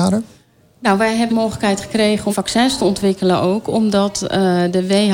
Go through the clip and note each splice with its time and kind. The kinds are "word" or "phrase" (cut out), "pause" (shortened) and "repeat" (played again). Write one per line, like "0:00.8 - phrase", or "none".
0:01.3 - word
0:02.3 - word